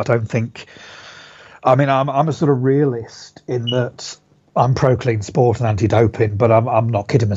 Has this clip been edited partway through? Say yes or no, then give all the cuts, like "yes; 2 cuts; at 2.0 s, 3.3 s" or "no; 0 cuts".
no; 0 cuts